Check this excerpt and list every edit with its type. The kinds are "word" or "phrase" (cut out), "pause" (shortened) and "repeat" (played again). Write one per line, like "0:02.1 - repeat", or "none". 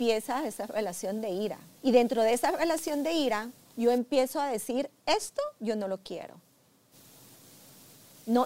0:01.8 - pause
0:03.6 - pause
0:05.5 - pause